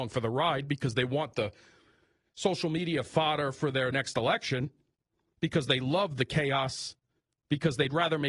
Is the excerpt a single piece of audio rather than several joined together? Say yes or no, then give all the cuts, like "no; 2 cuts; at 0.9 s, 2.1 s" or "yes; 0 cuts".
yes; 0 cuts